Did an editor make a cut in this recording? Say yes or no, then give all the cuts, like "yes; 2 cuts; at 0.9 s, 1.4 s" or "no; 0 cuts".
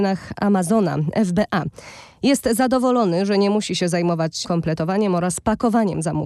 yes; 1 cut; at 4.4 s